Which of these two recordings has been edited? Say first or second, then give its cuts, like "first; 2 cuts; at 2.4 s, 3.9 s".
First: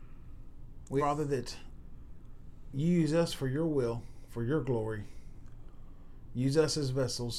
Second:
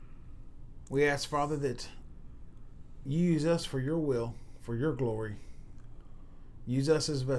first; 1 cut; at 1.0 s